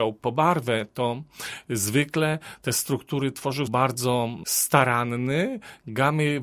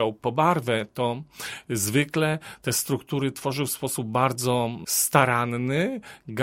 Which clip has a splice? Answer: first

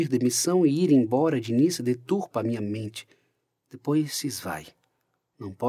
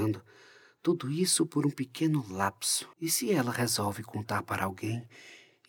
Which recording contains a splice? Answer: second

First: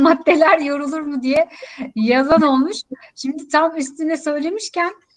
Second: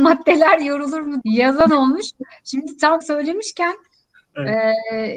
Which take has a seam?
second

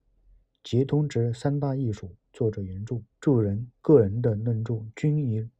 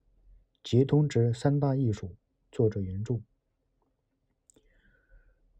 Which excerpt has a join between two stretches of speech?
first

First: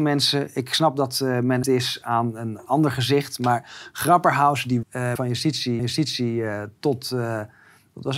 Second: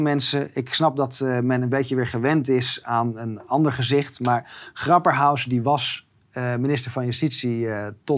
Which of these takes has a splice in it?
first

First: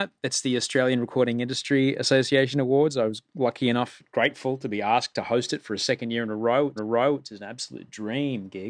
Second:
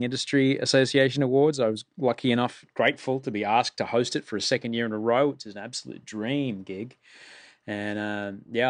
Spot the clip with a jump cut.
first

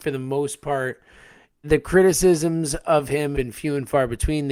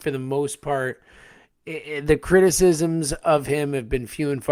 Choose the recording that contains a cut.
first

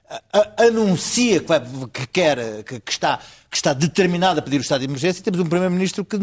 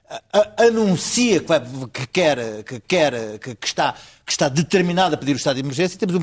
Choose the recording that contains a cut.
second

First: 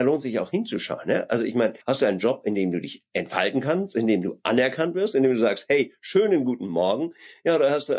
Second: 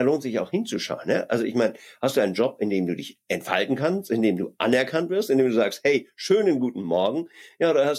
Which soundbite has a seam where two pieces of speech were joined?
first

